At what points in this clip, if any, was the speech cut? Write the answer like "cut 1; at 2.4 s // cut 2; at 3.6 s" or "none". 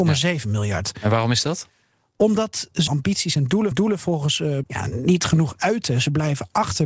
cut 1; at 2.9 s // cut 2; at 3.7 s // cut 3; at 4.6 s